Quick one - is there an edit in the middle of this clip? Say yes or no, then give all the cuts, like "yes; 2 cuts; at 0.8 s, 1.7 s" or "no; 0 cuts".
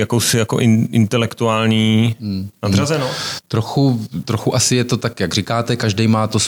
no; 0 cuts